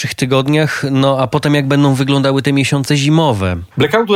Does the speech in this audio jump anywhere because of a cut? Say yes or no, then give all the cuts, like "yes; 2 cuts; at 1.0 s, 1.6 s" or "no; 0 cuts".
no; 0 cuts